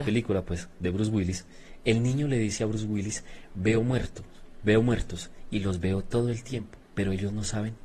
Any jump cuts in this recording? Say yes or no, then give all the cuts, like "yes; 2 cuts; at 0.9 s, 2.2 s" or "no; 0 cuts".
no; 0 cuts